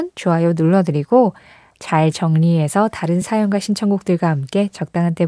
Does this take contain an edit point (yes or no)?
no